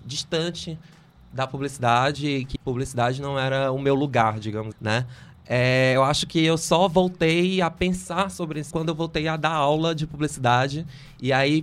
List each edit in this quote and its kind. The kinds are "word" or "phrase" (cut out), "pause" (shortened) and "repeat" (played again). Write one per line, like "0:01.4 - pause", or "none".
0:02.6 - word
0:04.7 - word
0:08.7 - word